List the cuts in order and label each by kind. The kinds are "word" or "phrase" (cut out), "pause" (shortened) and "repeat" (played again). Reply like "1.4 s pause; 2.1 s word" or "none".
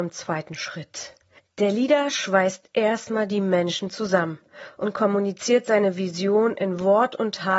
none

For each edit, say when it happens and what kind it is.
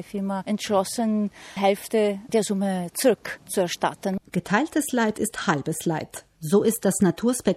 1.6 s phrase; 4.2 s pause

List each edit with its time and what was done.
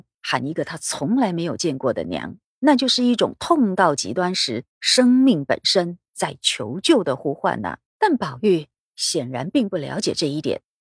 2.5 s pause; 4.7 s pause; 7.9 s pause

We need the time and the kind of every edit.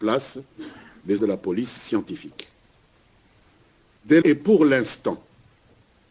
1.2 s word; 4.2 s word

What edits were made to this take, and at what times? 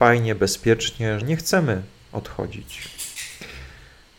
1.2 s word

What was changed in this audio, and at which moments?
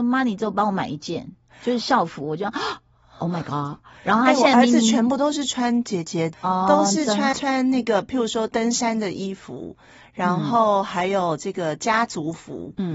6.3 s word; 7.3 s word

